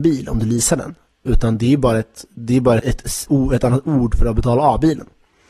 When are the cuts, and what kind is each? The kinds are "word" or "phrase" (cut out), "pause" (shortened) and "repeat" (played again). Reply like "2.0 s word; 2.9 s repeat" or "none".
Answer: 2.8 s word; 3.3 s word